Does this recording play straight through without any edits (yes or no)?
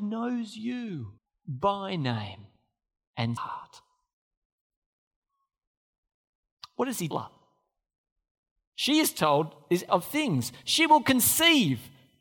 no